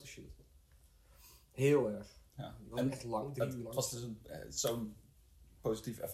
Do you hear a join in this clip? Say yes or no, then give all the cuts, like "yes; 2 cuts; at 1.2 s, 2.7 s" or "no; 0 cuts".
no; 0 cuts